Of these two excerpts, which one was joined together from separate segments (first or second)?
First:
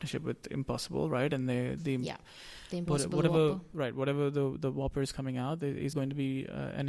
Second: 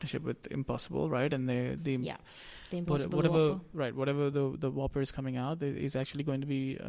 first